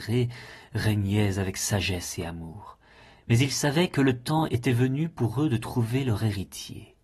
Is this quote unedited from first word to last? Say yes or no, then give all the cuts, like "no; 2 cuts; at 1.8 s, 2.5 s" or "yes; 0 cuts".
yes; 0 cuts